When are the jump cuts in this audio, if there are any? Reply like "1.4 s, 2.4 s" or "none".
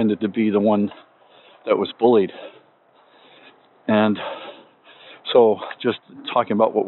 none